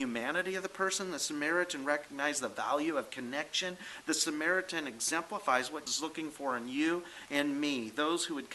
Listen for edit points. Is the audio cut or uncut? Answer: cut